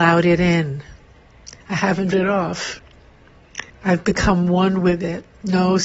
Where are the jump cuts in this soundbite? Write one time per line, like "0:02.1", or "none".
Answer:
0:01.6
0:02.1
0:03.7